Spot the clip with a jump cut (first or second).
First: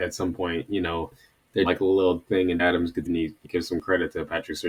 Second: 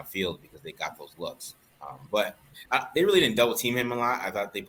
first